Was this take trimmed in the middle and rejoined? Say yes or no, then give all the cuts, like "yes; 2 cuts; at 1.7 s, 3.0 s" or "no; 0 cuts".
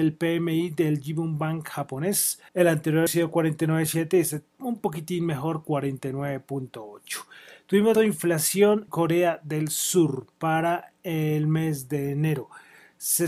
yes; 4 cuts; at 2.5 s, 3.1 s, 7.9 s, 8.9 s